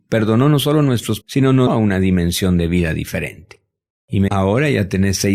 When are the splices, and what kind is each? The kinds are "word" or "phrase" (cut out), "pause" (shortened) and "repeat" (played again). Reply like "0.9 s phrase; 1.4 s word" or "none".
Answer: 1.2 s word; 1.7 s word; 4.3 s word